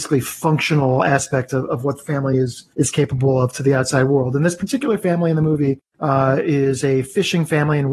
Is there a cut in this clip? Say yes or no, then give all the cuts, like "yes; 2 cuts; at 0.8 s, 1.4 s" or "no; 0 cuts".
no; 0 cuts